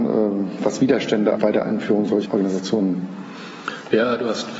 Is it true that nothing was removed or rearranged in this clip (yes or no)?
no